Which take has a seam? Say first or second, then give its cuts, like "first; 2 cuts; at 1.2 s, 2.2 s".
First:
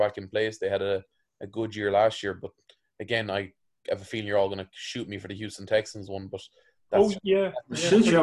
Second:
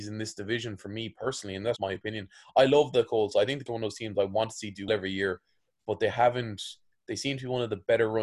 second; 3 cuts; at 1.8 s, 3.7 s, 4.9 s